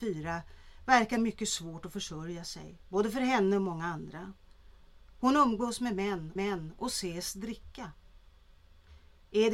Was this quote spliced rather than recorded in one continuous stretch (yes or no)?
yes